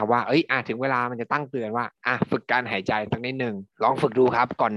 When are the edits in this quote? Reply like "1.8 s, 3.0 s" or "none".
1.9 s, 3.7 s